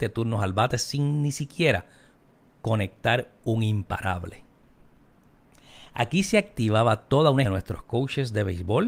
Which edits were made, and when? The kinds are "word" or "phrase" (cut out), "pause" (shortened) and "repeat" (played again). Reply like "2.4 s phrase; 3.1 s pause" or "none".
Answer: 7.4 s word

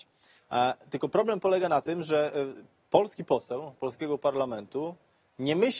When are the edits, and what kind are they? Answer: none

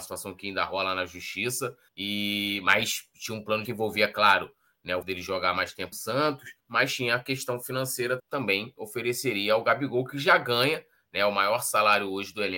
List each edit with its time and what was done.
1.9 s pause; 3.6 s phrase; 5.0 s word; 5.9 s word; 6.6 s pause; 8.2 s phrase

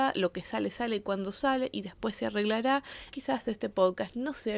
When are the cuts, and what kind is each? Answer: 3.1 s word

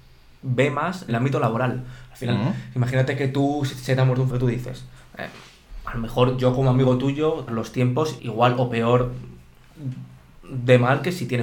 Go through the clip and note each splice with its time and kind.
1.1 s word; 4.3 s phrase; 7.5 s phrase; 8.2 s phrase

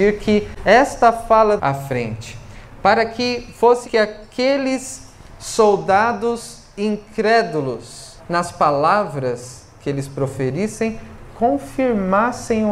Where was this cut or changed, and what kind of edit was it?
1.6 s phrase; 3.8 s word; 8.2 s pause

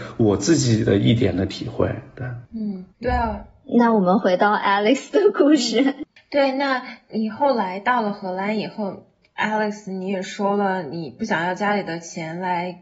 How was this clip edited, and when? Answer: 2.9 s pause

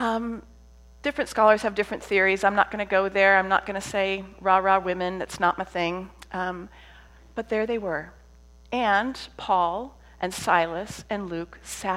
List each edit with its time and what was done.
none

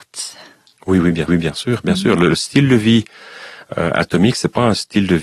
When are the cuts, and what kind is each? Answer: 1.3 s repeat

